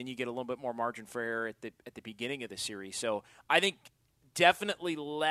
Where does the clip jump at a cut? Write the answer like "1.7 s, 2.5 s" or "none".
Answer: none